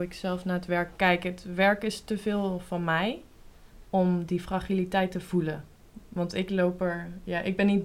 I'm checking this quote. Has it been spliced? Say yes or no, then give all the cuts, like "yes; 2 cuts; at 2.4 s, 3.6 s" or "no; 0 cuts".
no; 0 cuts